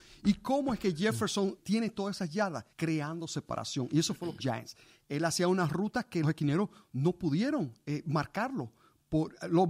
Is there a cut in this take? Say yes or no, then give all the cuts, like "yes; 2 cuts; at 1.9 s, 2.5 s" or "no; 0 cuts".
yes; 4 cuts; at 1.6 s, 2.7 s, 4.4 s, 6.2 s